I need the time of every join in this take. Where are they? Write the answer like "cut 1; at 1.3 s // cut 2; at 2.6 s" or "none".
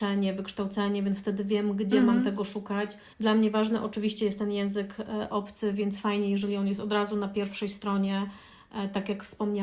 cut 1; at 3.1 s

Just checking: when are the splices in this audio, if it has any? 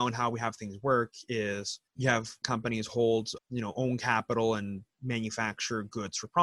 cut 1; at 1.9 s // cut 2; at 2.4 s // cut 3; at 3.4 s

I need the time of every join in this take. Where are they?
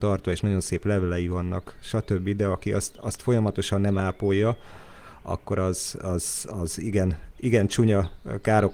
none

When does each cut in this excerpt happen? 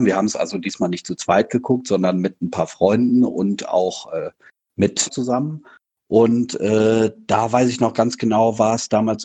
cut 1; at 5.1 s

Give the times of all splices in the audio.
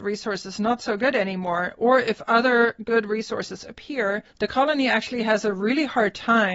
cut 1; at 4.3 s

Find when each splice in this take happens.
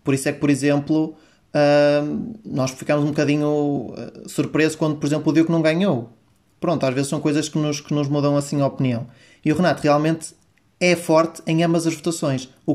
none

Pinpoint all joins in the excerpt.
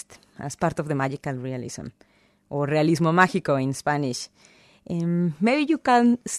none

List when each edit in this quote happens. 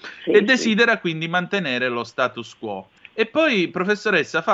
cut 1; at 3.0 s

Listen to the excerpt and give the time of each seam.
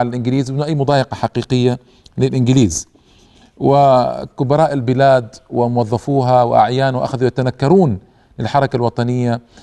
none

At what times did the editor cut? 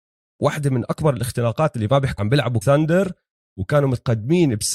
cut 1; at 2.2 s // cut 2; at 2.6 s

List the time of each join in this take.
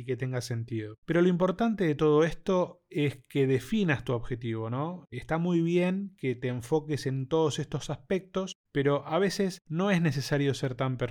cut 1; at 1.0 s

